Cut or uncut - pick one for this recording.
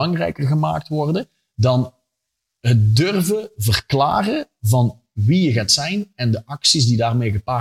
uncut